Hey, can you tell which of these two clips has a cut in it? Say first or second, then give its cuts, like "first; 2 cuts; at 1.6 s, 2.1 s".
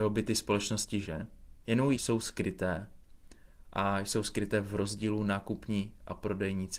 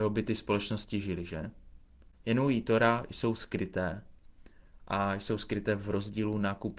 first; 3 cuts; at 1.0 s, 1.6 s, 1.9 s